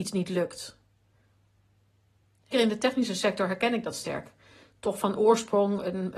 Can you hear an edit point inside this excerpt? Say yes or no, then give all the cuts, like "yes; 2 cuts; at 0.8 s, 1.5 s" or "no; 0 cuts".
yes; 1 cut; at 2.5 s